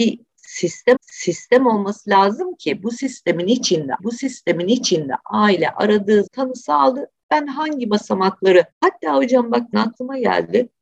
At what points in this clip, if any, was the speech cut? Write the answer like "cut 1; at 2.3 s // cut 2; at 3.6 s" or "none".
cut 1; at 1.0 s // cut 2; at 4.0 s // cut 3; at 6.3 s // cut 4; at 8.7 s // cut 5; at 9.7 s

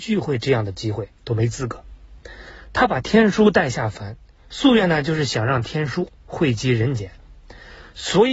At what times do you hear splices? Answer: cut 1; at 1.2 s

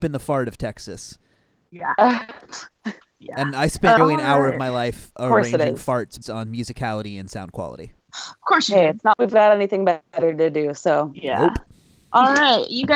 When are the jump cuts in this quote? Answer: cut 1; at 4.0 s // cut 2; at 6.2 s // cut 3; at 9.1 s

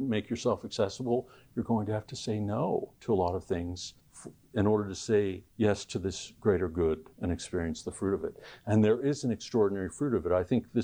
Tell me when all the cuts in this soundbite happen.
cut 1; at 3.0 s // cut 2; at 4.0 s // cut 3; at 5.5 s // cut 4; at 7.1 s

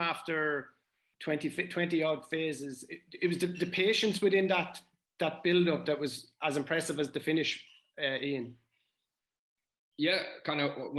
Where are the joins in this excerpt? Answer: none

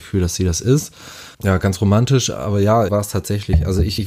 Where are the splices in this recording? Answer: cut 1; at 1.3 s // cut 2; at 2.9 s

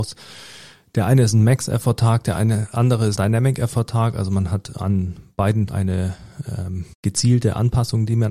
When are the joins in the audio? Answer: cut 1; at 3.2 s // cut 2; at 5.7 s // cut 3; at 6.9 s

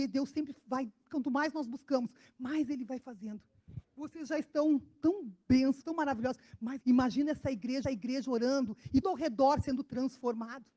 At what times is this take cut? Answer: cut 1; at 3.8 s // cut 2; at 5.8 s // cut 3; at 6.8 s // cut 4; at 7.8 s // cut 5; at 9.0 s

